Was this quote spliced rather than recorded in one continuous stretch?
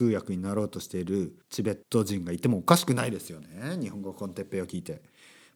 yes; 2 cuts; at 1.4 s, 1.8 s

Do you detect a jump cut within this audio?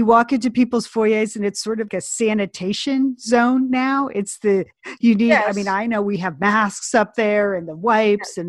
yes; 1 cut; at 1.9 s

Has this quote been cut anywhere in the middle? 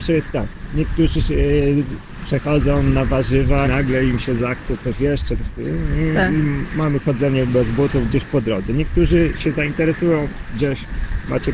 yes; 2 cuts; at 3.6 s, 5.4 s

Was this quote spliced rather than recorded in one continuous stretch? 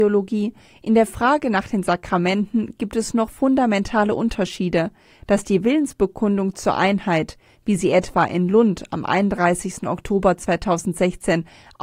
yes; 1 cut; at 3.3 s

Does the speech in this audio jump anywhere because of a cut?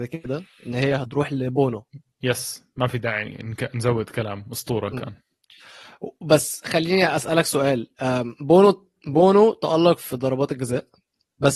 no; 0 cuts

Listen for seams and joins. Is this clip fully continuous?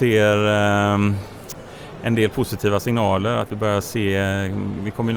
yes; 0 cuts

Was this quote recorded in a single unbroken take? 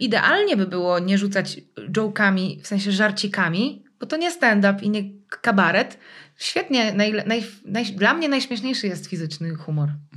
yes; 0 cuts

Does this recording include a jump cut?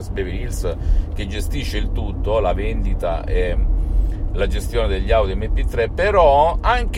no; 0 cuts

